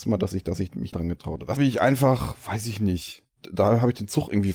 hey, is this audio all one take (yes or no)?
no